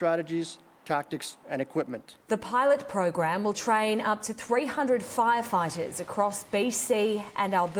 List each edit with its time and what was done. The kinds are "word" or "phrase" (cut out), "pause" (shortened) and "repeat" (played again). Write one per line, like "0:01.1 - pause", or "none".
none